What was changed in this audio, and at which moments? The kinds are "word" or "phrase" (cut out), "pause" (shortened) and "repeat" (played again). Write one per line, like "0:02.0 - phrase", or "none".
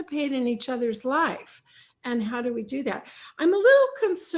none